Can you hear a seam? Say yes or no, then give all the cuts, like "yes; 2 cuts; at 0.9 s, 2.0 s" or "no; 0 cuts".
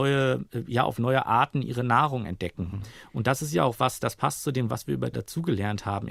yes; 1 cut; at 5.1 s